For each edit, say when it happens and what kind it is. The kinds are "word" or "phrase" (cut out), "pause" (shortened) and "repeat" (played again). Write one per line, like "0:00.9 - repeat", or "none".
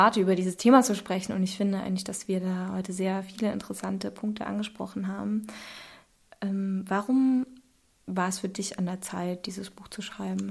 none

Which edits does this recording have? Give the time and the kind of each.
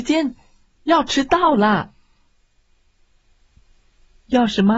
none

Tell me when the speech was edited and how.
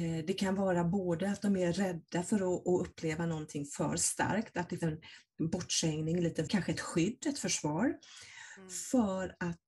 0:04.8 - word
0:06.5 - word

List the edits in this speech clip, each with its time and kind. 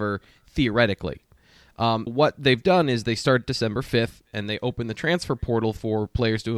0:02.1 - word

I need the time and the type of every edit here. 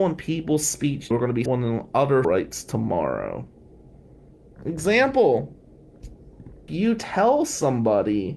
0:01.1 - word
0:01.5 - word
0:02.2 - word
0:06.7 - word

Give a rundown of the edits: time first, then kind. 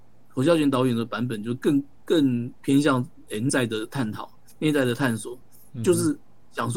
0:03.5 - word

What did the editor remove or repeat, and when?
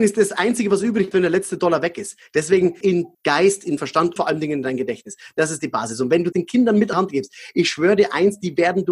0:01.1 - word
0:02.8 - word
0:03.1 - word
0:03.8 - word
0:04.2 - word
0:06.3 - word
0:06.9 - word

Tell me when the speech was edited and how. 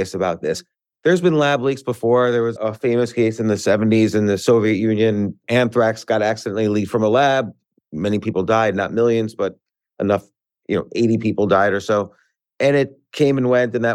0:00.9 - word
0:02.6 - word

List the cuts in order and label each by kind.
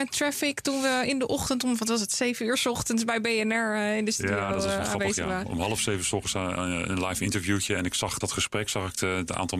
0:08.2 - word

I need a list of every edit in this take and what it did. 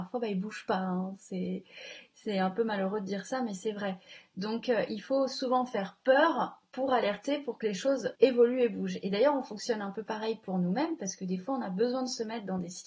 0:08.1 - pause

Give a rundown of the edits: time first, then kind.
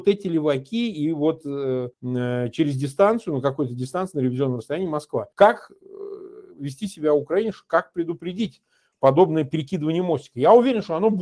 0:01.9 - pause
0:05.3 - pause

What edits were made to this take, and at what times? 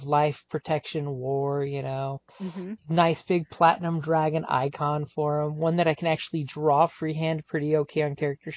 0:02.3 - pause

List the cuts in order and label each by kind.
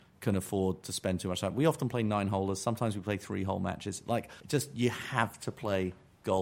0:04.4 - pause

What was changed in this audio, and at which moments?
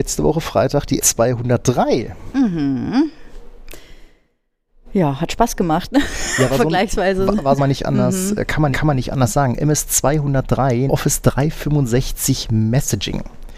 0:01.0 - word
0:07.6 - phrase
0:08.7 - repeat
0:10.9 - word

